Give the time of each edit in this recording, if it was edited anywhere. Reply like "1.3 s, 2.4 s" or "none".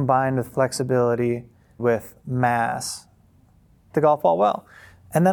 1.8 s, 3.9 s